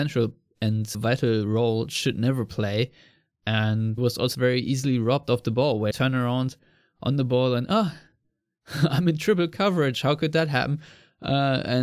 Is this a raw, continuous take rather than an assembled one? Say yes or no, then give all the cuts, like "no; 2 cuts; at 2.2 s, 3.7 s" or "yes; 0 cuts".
no; 4 cuts; at 0.9 s, 4.0 s, 4.3 s, 5.9 s